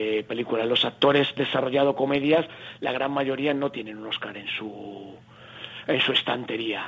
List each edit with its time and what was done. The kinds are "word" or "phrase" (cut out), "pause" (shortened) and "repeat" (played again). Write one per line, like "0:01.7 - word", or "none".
0:01.4 - word